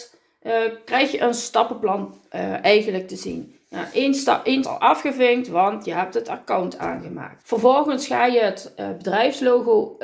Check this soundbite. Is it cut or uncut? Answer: cut